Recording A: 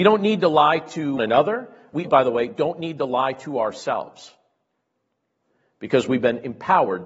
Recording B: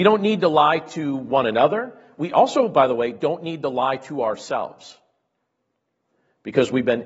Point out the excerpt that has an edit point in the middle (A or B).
A